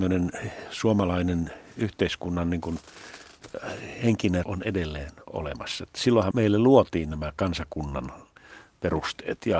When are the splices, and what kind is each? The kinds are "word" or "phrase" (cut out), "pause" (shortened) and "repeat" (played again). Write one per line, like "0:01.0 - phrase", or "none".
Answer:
0:04.4 - word
0:06.3 - word